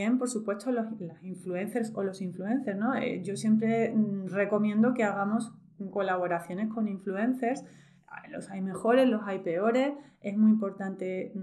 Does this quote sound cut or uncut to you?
uncut